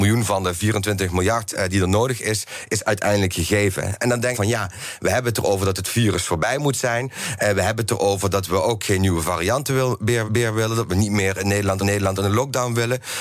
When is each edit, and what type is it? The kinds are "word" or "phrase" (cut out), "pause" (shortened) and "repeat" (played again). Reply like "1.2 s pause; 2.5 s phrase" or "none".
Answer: 4.3 s phrase; 10.3 s repeat; 11.8 s repeat

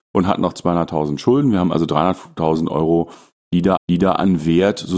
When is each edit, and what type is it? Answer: 3.8 s repeat

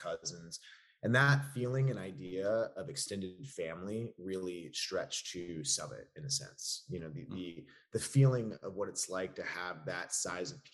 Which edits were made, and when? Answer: none

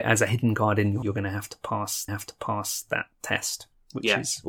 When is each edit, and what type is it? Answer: 1.0 s word; 2.1 s repeat

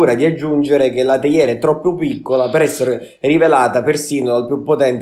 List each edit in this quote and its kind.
none

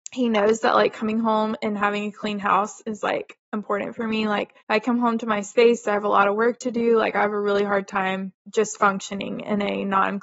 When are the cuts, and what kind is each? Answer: 4.6 s pause; 8.4 s pause

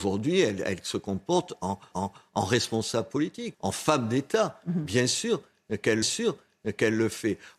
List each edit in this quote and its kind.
1.9 s repeat; 3.5 s phrase; 6.0 s repeat

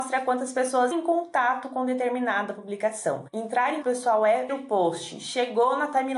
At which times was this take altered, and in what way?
0.9 s word; 3.8 s word; 4.5 s word

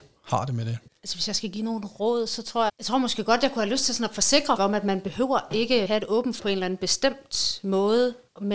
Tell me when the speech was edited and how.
2.7 s word; 4.6 s word; 5.8 s word; 6.4 s word

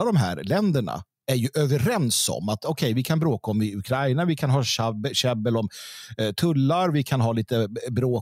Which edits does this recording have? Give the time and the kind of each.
none

